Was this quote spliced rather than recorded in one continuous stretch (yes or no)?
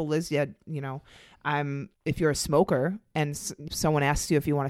yes